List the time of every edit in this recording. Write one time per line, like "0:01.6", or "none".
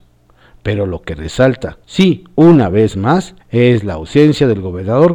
0:01.8
0:03.4